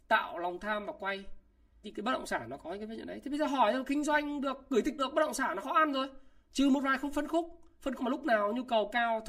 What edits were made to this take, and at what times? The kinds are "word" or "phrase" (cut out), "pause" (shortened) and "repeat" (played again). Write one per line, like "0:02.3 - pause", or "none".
0:01.8 - word
0:05.0 - word
0:05.6 - word
0:08.0 - word